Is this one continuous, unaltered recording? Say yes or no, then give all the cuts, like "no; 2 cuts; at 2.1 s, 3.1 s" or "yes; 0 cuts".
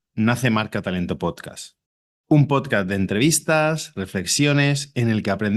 yes; 0 cuts